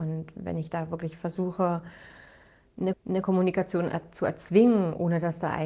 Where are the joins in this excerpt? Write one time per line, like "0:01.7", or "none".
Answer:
0:02.9